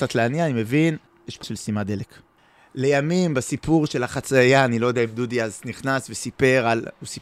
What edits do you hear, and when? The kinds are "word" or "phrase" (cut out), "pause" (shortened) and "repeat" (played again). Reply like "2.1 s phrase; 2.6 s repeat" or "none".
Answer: 1.1 s pause; 1.4 s word; 2.4 s pause